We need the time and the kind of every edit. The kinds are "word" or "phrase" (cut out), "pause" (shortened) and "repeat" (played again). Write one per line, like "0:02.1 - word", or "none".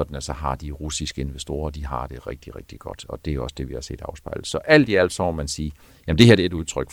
none